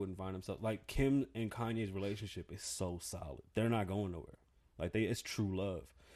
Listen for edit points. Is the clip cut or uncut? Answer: cut